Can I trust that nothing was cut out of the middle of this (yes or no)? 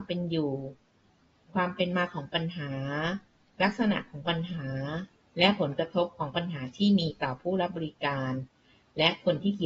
yes